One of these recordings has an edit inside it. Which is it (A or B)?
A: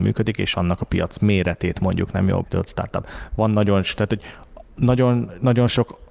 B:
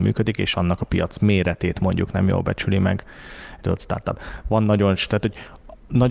A